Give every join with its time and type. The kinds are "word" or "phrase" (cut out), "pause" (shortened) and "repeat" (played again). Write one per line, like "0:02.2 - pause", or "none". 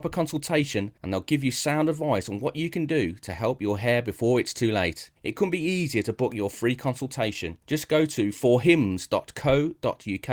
0:01.0 - pause
0:05.2 - pause
0:07.6 - pause

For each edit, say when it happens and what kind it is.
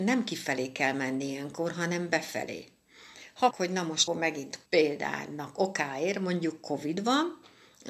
0:03.5 - phrase
0:04.1 - word
0:04.7 - pause

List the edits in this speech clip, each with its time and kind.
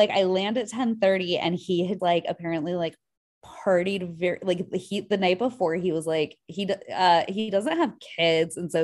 0:02.0 - word

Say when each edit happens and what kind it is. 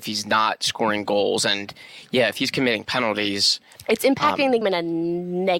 0:04.6 - word

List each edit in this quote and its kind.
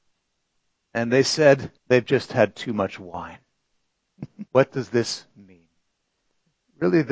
0:01.8 - pause
0:04.5 - pause

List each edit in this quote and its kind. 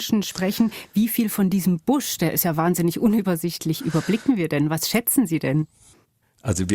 none

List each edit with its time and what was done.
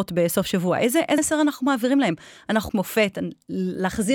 0:01.2 - word
0:02.7 - phrase

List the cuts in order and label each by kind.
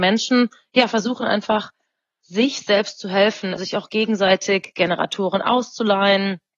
none

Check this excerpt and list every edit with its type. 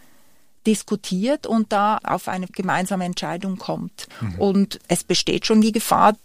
0:02.0 - word
0:02.5 - word
0:04.1 - pause
0:04.8 - word

